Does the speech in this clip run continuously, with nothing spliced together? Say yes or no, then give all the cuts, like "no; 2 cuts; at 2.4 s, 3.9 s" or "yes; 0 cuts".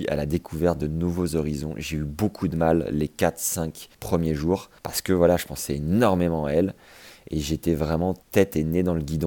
no; 3 cuts; at 3.9 s, 4.8 s, 8.2 s